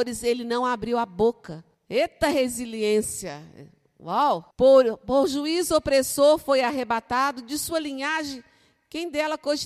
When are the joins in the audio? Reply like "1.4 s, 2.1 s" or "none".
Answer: 1.7 s, 4.5 s